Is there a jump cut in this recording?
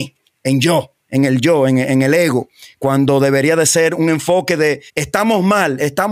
yes; 1 cut; at 4.9 s

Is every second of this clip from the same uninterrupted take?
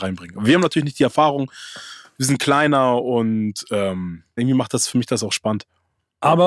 no; 1 cut; at 4.4 s

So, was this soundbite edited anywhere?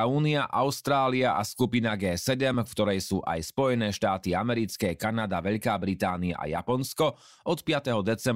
no; 0 cuts

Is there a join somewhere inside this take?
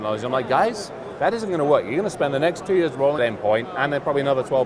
yes; 1 cut; at 3.2 s

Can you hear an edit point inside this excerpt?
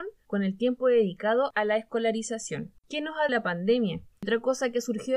yes; 2 cuts; at 2.8 s, 3.3 s

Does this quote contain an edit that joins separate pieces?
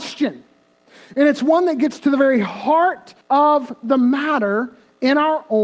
yes; 1 cut; at 3.2 s

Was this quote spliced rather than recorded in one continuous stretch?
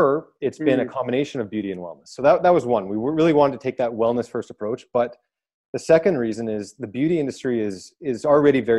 no; 0 cuts

